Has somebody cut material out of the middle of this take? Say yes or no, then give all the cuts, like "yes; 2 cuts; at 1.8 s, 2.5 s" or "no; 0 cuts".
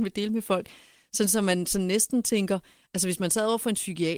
no; 0 cuts